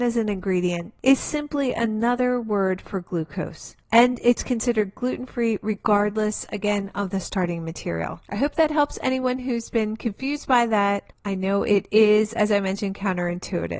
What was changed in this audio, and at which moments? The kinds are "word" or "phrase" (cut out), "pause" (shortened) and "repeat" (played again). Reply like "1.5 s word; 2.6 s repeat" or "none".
8.2 s pause